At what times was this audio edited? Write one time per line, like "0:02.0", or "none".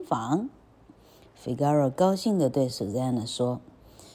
none